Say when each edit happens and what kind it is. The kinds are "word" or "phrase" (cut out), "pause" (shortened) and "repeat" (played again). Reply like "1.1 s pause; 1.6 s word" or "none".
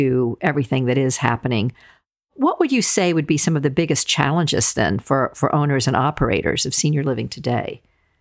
none

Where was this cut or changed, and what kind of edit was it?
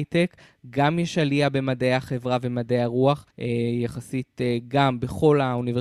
3.3 s pause

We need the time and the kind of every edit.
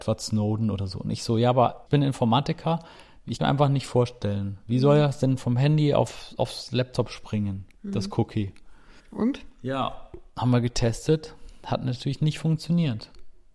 1.9 s word; 3.4 s phrase; 9.0 s pause

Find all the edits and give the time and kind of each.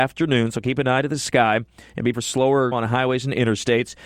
2.1 s word; 2.7 s word

